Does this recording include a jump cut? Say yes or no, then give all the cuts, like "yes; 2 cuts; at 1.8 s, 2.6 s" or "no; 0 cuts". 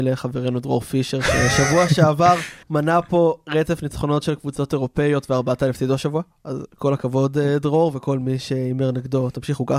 yes; 1 cut; at 2.6 s